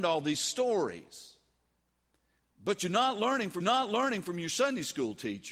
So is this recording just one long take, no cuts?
no; 1 cut; at 3.6 s

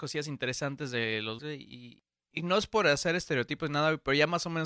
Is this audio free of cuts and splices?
no; 1 cut; at 1.4 s

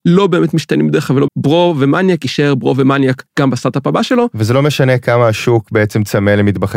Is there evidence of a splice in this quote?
yes; 2 cuts; at 1.3 s, 3.3 s

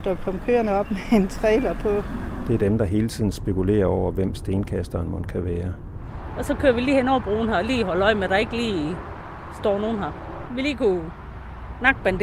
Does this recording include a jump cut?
no; 0 cuts

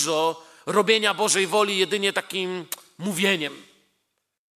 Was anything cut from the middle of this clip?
no; 0 cuts

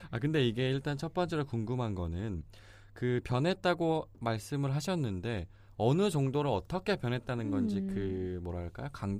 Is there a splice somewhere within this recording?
yes; 1 cut; at 4.1 s

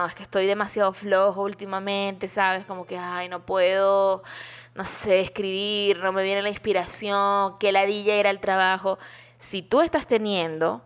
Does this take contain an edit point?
no; 0 cuts

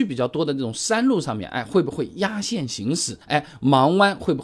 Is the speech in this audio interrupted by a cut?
yes; 1 cut; at 3.2 s

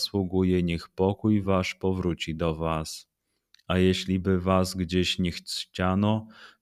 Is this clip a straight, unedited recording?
yes; 0 cuts

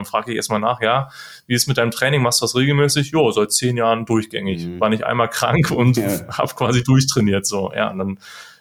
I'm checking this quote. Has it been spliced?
no; 0 cuts

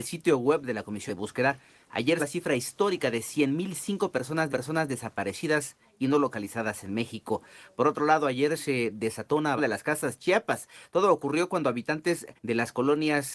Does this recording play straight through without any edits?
no; 5 cuts; at 1.1 s, 2.2 s, 4.5 s, 9.6 s, 12.4 s

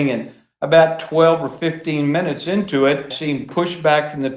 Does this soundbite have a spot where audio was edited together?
yes; 1 cut; at 3.1 s

